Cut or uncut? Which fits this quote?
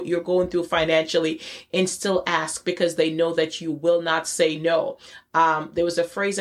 uncut